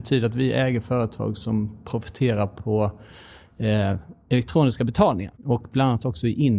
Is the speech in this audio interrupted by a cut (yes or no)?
yes